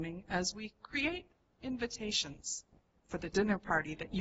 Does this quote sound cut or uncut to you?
cut